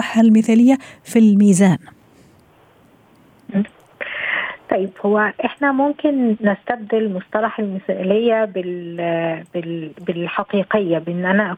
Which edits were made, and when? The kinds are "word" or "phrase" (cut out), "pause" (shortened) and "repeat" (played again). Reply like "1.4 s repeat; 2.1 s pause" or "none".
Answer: none